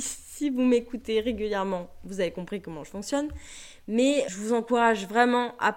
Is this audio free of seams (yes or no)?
no